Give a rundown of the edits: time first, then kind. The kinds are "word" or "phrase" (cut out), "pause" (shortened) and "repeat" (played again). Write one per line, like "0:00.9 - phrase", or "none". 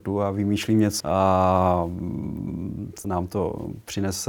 0:01.0 - phrase
0:03.0 - word